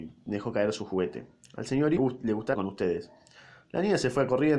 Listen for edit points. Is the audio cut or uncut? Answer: cut